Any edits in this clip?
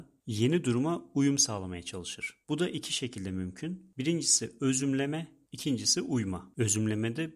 no; 0 cuts

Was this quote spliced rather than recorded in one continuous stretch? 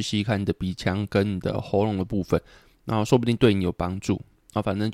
no; 0 cuts

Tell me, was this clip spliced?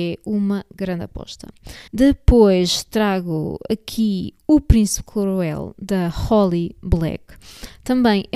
yes; 1 cut; at 1.9 s

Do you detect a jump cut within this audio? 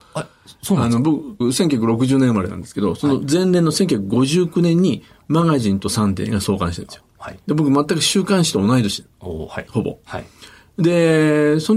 yes; 1 cut; at 1.4 s

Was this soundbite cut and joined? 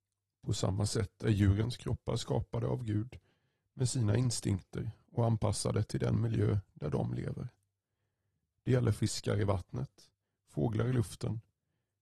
no; 0 cuts

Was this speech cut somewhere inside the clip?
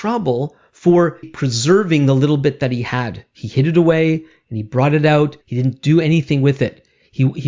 yes; 2 cuts; at 1.2 s, 5.4 s

